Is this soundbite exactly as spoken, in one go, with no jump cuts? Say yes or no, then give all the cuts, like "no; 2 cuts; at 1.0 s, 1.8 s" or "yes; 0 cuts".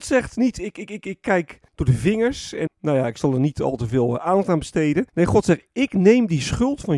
no; 4 cuts; at 1.0 s, 1.7 s, 2.7 s, 5.1 s